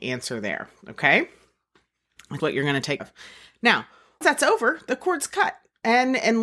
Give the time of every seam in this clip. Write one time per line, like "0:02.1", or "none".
0:02.4
0:03.0
0:04.2